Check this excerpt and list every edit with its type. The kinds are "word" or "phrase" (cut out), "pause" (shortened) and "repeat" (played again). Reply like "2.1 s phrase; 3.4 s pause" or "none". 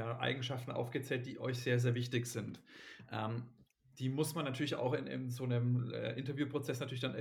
none